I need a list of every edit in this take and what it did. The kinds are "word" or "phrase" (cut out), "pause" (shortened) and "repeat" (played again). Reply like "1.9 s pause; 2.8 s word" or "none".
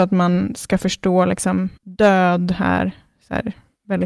1.8 s pause